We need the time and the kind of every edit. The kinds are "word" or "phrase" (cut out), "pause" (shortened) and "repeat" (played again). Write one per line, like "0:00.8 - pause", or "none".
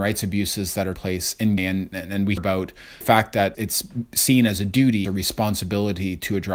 0:00.9 - word
0:01.6 - word
0:01.9 - word
0:02.4 - word
0:03.0 - word
0:03.5 - word
0:05.0 - word